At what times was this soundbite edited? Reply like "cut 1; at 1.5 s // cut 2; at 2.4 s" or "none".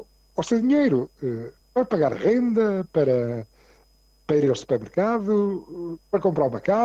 cut 1; at 1.6 s